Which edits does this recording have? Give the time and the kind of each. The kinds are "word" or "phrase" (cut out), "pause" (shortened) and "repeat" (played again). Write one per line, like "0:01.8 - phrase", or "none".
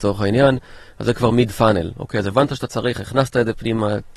none

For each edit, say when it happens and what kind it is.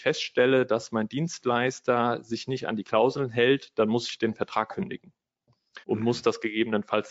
0:05.8 - pause

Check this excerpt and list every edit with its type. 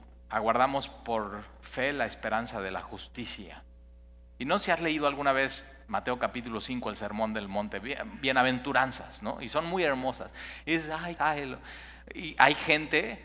0:11.2 - phrase

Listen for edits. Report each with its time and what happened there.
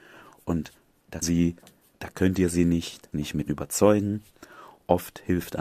0:01.2 - word
0:03.1 - word
0:03.5 - phrase

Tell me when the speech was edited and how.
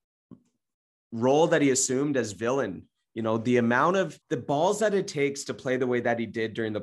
0:04.2 - pause

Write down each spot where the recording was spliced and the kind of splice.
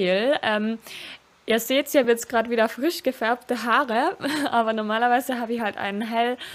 none

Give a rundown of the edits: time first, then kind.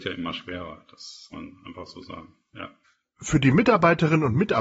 0:01.3 - word

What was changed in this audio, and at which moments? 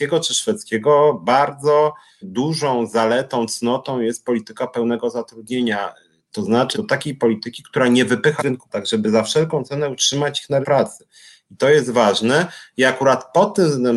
0:02.2 - word
0:06.7 - word
0:08.4 - word
0:08.7 - word
0:10.6 - word

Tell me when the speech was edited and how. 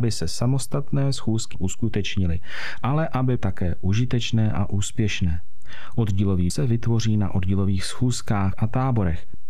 0:01.5 - word
0:03.4 - word
0:06.5 - word
0:08.5 - word

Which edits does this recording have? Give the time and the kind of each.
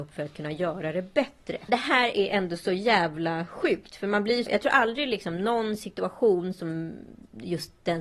0:04.5 - word

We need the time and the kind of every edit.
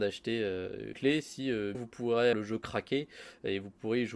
0:00.9 - word
0:01.7 - word
0:02.3 - word

